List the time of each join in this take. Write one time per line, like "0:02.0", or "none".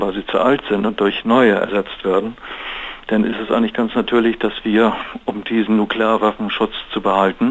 none